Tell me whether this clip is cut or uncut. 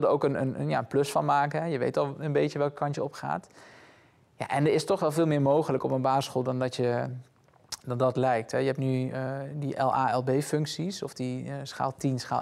uncut